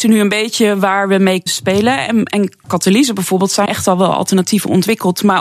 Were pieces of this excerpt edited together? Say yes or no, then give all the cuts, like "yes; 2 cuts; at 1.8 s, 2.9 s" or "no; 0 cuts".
yes; 3 cuts; at 1.5 s, 2.6 s, 3.7 s